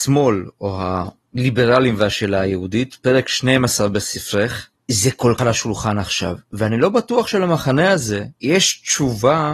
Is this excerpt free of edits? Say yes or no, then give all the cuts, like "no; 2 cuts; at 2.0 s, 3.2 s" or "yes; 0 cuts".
no; 2 cuts; at 5.4 s, 8.4 s